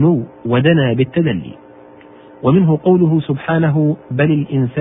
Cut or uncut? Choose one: uncut